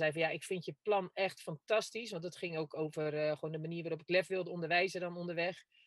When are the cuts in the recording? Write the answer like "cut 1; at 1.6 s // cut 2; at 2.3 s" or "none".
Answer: none